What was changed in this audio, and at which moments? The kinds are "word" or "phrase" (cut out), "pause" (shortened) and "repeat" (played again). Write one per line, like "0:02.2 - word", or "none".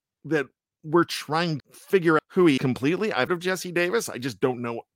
0:01.6 - word
0:02.2 - word
0:02.6 - word
0:03.3 - word